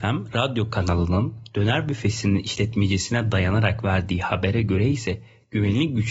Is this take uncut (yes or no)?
yes